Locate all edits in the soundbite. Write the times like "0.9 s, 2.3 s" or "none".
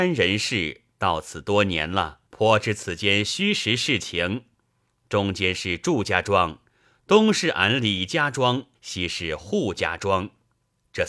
2.3 s, 8.7 s